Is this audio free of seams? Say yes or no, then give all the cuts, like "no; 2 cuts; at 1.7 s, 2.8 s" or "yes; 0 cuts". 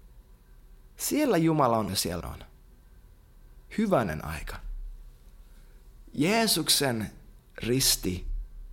no; 3 cuts; at 1.9 s, 2.2 s, 3.7 s